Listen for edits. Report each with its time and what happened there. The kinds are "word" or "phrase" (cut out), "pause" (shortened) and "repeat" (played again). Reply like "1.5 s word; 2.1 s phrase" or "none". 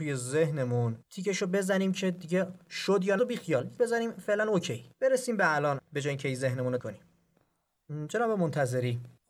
1.0 s pause; 3.2 s word; 3.8 s word; 4.9 s pause; 5.8 s phrase; 6.8 s word